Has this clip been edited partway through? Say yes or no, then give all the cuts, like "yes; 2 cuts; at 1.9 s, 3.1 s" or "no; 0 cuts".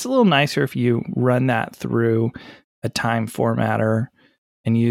no; 0 cuts